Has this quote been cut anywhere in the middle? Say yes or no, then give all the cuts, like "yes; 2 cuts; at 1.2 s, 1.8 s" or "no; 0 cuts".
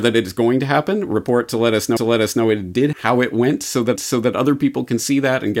yes; 3 cuts; at 2.0 s, 2.9 s, 4.0 s